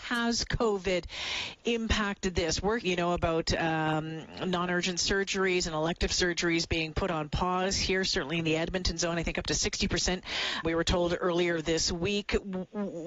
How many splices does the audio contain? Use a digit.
2